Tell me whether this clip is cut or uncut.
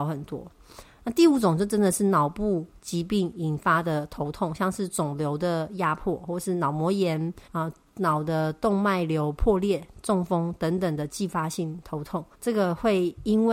cut